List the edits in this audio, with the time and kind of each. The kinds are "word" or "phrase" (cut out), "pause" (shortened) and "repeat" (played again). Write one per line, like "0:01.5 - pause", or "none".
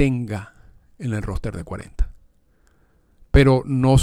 none